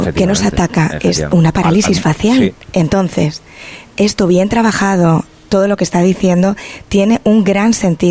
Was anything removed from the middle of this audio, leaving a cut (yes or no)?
yes